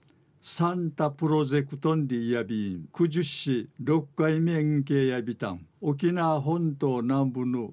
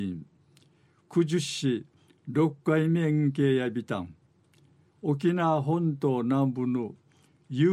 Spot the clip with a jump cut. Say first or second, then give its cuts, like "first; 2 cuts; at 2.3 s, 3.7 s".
first; 3 cuts; at 2.9 s, 3.7 s, 5.7 s